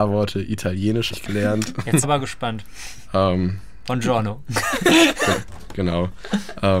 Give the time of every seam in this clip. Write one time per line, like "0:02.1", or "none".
0:01.1
0:02.0